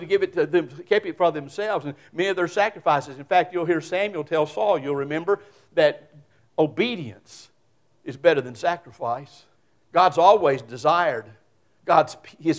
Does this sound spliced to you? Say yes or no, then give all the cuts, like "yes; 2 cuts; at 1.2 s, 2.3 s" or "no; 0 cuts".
yes; 1 cut; at 9.6 s